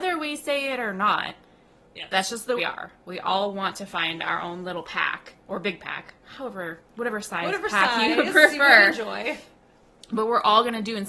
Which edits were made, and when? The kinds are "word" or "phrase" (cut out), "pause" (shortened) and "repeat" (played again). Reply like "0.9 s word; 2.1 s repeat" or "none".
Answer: 2.6 s phrase; 5.4 s pause